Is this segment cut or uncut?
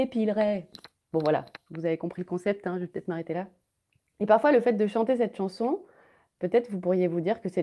uncut